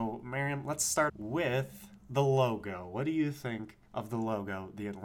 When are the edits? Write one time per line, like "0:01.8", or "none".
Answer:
0:01.1
0:03.9